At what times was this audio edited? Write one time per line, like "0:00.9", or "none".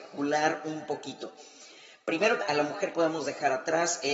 0:02.4
0:02.9